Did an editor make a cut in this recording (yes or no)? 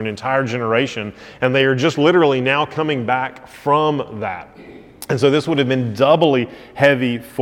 no